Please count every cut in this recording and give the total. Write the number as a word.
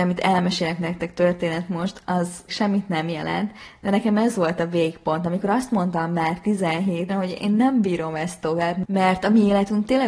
two